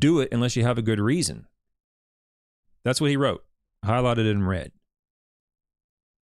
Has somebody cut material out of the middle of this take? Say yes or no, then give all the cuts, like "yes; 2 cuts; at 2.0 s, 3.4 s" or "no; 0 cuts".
no; 0 cuts